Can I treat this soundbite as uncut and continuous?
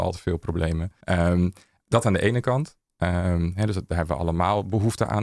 no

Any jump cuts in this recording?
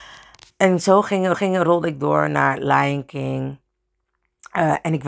yes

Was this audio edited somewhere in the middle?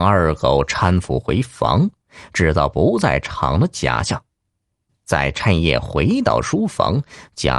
no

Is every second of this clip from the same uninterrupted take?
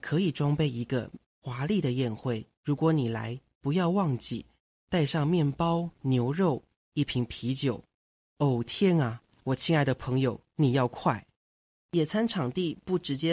no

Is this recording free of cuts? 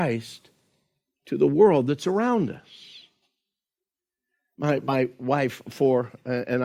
yes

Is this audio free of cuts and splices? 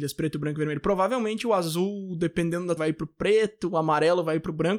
no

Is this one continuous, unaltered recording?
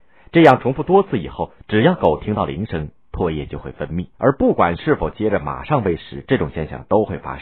no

